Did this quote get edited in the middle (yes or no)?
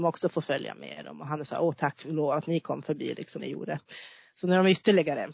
yes